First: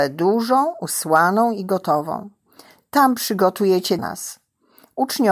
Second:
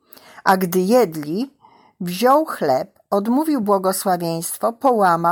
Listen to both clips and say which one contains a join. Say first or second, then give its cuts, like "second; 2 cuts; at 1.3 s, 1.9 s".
first; 1 cut; at 4.0 s